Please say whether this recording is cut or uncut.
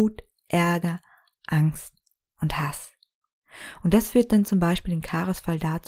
uncut